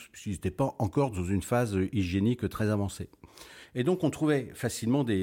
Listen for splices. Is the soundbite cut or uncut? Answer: uncut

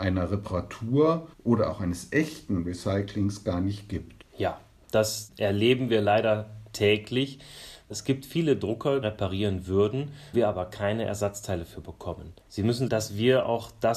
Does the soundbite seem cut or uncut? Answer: cut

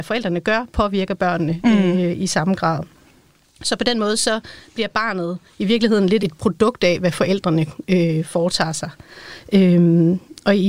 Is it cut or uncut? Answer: cut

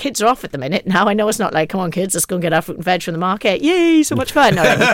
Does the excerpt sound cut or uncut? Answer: uncut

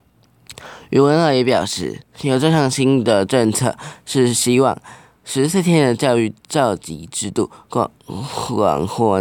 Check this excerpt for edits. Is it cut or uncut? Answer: uncut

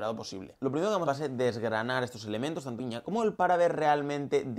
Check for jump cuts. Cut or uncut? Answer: cut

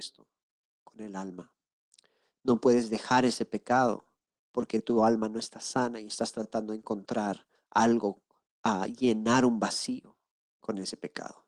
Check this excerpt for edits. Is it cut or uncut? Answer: cut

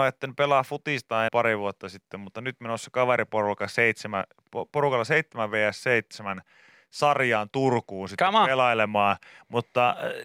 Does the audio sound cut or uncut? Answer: cut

